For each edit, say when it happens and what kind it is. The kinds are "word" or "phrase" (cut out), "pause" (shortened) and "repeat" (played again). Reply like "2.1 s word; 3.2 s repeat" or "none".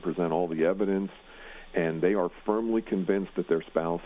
none